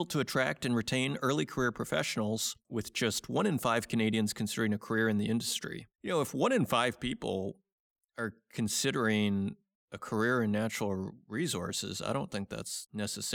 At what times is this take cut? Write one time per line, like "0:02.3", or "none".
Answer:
0:05.9